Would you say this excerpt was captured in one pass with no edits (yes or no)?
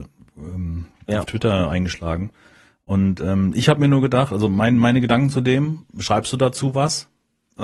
yes